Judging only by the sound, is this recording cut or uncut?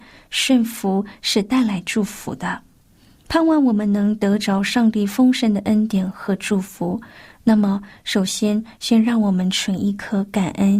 uncut